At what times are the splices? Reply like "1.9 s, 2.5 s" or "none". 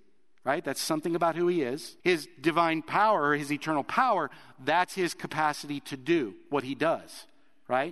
2.0 s